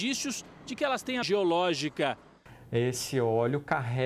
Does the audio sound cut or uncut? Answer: cut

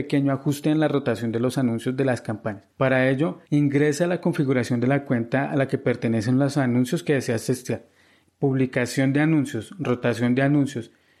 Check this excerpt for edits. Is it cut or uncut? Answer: cut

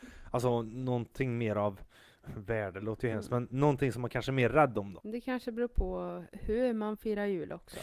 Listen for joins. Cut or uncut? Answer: uncut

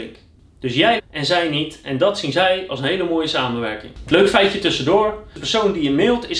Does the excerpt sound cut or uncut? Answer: cut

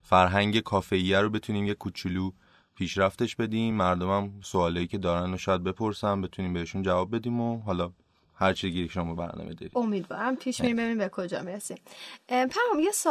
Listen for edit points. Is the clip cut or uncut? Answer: uncut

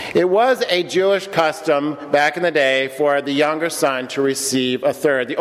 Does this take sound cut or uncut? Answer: uncut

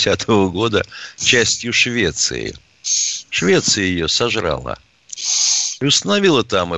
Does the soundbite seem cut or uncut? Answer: uncut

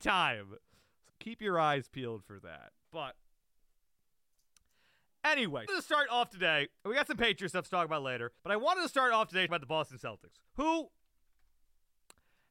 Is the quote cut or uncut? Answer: cut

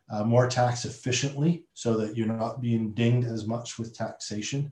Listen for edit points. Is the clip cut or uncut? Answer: cut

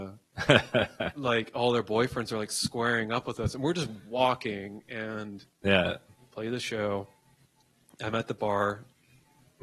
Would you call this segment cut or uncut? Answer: uncut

